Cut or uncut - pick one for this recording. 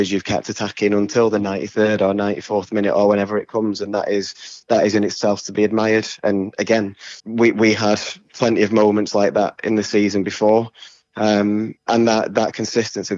cut